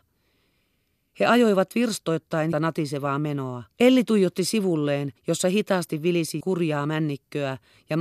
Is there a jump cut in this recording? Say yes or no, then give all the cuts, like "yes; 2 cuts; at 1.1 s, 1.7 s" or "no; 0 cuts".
yes; 4 cuts; at 2.5 s, 3.7 s, 5.2 s, 6.4 s